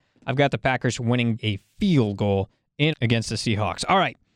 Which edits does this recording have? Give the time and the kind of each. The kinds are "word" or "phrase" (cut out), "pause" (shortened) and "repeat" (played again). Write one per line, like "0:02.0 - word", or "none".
0:01.4 - word
0:02.9 - word